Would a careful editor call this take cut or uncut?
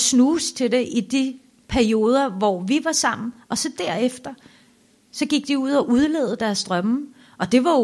uncut